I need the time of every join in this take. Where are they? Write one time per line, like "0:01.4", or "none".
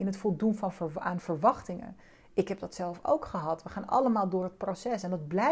none

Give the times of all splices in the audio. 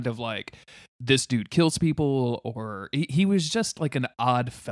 none

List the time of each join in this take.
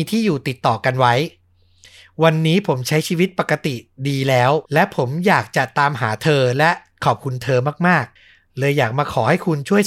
0:04.6
0:08.2

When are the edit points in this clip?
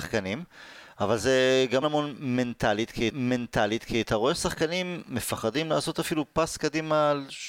0:01.8
0:03.1

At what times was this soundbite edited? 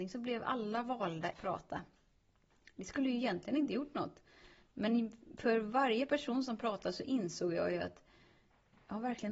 0:01.3

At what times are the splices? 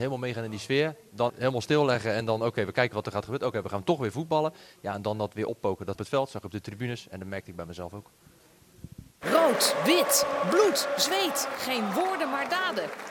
0:01.3
0:02.9
0:05.9
0:09.1

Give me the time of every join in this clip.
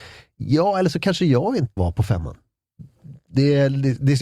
0:01.8

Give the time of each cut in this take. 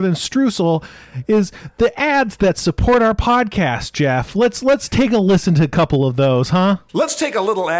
0:06.9

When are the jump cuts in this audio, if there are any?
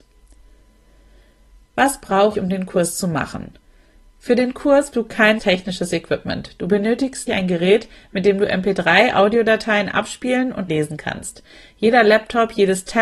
0:02.3
0:04.9
0:05.4
0:07.3
0:10.7

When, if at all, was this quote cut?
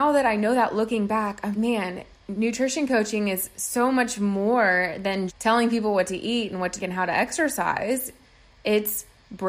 0:01.5
0:05.3
0:06.8

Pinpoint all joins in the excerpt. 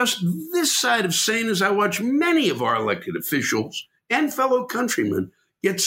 none

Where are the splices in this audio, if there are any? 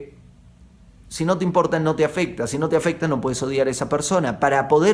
none

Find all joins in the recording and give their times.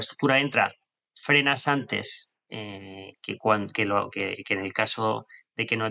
0:04.1

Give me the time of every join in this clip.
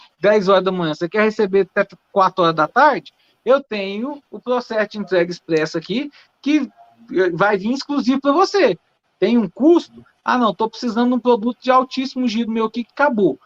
none

